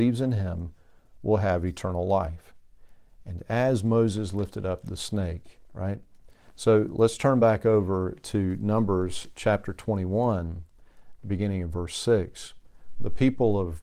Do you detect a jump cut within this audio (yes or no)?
no